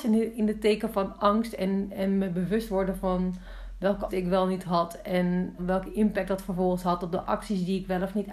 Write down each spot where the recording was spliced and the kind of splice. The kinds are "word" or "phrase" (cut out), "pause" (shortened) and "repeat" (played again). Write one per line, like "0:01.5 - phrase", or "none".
0:04.1 - word
0:05.6 - word